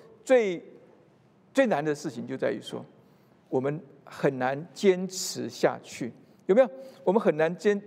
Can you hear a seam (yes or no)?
no